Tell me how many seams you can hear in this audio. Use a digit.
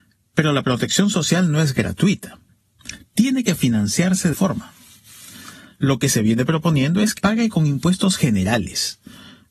2